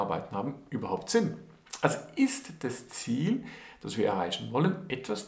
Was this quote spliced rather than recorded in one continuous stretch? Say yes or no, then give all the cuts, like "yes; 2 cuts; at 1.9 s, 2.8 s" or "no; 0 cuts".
no; 0 cuts